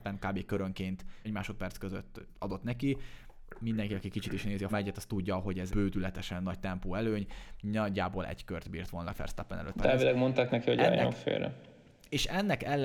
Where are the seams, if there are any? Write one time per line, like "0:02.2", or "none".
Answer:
0:01.2
0:04.7
0:05.7
0:09.1
0:09.7